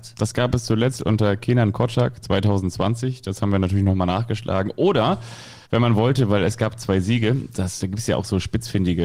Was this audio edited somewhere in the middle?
yes; 2 cuts; at 5.6 s, 7.8 s

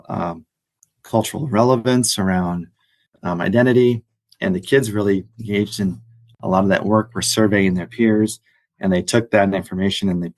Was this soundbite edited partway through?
no; 0 cuts

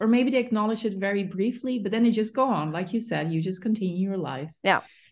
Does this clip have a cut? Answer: no; 0 cuts

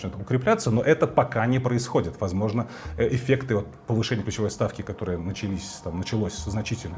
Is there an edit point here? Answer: no; 0 cuts

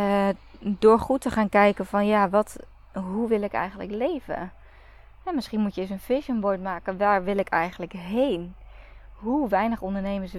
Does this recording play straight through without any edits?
yes; 0 cuts

